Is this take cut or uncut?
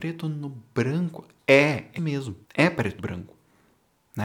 cut